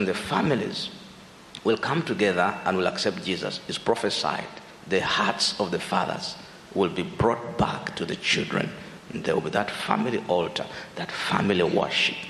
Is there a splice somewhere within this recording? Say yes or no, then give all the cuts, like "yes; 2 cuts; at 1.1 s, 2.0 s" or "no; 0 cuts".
yes; 1 cut; at 9.2 s